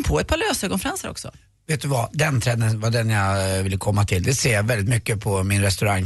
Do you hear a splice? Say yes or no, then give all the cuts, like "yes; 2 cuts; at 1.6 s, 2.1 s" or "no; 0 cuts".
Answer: no; 0 cuts